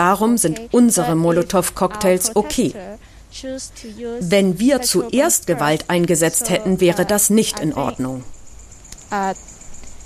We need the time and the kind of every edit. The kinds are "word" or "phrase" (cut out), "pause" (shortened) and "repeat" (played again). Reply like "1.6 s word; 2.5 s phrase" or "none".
none